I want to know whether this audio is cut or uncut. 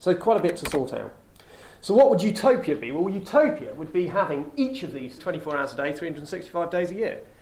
cut